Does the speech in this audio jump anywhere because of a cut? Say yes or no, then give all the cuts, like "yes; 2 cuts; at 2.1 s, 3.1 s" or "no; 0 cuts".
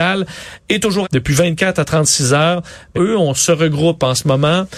yes; 2 cuts; at 1.0 s, 2.9 s